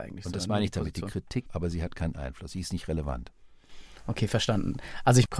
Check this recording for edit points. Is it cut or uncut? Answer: cut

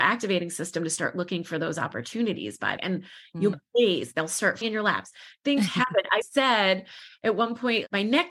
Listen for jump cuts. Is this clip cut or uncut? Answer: cut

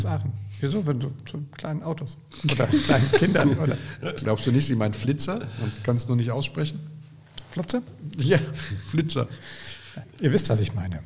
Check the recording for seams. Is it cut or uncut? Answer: uncut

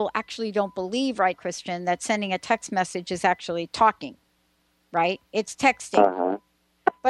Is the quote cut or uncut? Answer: cut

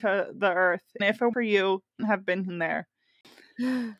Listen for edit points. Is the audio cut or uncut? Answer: cut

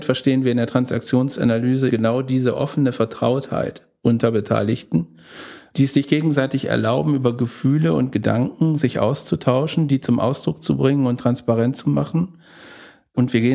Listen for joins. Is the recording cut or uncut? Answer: cut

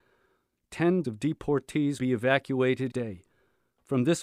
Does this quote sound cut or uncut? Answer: cut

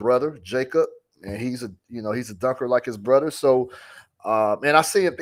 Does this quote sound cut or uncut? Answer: uncut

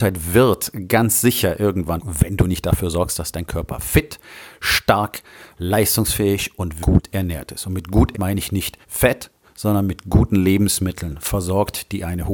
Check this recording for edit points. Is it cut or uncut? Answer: cut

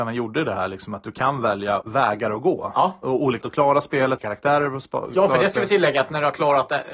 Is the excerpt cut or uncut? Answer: cut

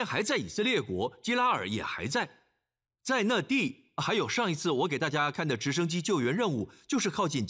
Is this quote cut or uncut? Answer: uncut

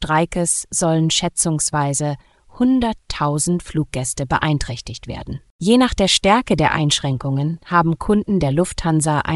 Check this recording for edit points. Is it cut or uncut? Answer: uncut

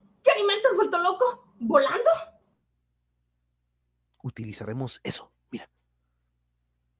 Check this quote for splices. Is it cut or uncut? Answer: uncut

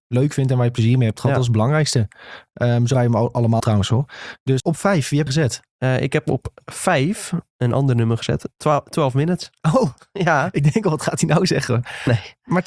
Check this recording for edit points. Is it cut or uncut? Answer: cut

